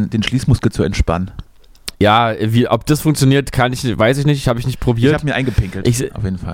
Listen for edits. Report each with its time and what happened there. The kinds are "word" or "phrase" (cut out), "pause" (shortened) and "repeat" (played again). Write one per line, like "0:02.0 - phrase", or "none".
0:01.9 - pause

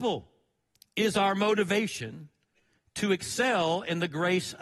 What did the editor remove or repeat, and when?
none

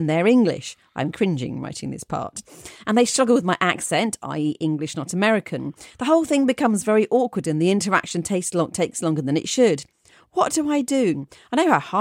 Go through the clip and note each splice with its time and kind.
none

